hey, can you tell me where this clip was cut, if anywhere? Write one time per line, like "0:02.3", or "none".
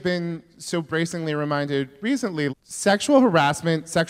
0:02.5

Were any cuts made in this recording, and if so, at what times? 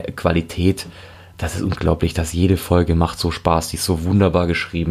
none

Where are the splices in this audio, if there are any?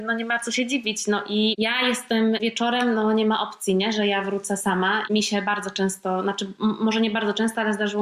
none

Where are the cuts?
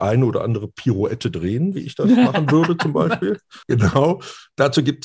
0:03.6

